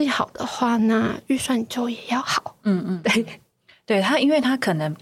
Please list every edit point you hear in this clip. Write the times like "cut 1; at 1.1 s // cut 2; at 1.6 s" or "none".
none